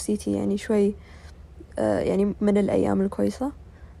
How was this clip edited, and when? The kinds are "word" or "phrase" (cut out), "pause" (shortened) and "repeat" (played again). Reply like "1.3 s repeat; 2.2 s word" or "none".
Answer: 2.4 s word